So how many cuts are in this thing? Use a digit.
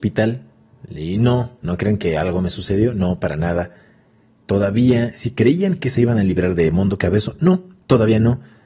0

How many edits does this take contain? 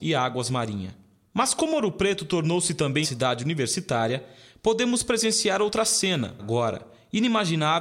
2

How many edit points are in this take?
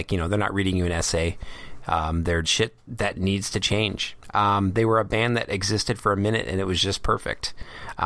1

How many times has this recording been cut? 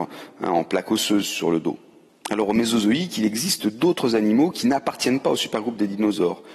0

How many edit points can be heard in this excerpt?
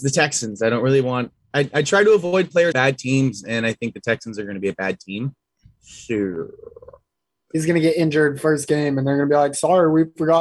1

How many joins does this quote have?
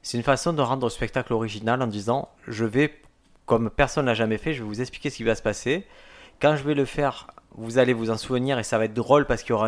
0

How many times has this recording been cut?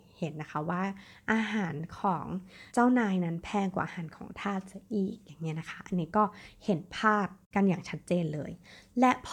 1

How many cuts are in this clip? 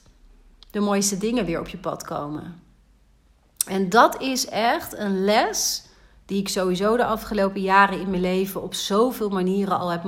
0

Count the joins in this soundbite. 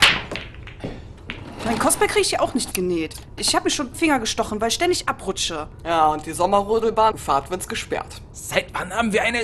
3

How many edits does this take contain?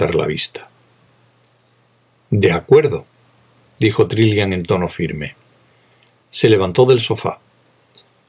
0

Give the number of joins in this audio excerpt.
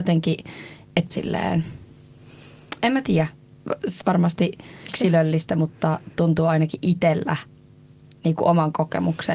3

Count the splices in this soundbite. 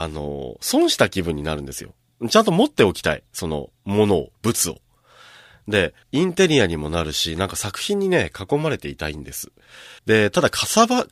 4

